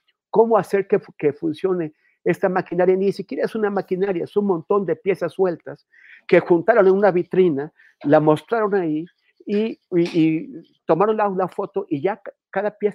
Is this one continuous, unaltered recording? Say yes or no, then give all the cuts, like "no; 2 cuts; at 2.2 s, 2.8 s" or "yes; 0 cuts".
yes; 0 cuts